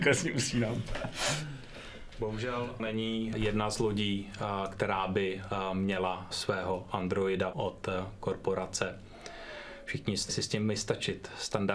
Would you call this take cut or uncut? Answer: cut